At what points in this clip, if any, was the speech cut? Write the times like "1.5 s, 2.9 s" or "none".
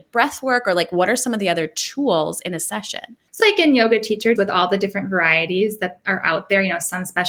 3.4 s, 4.4 s